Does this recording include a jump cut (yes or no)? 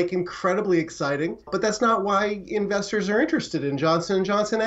yes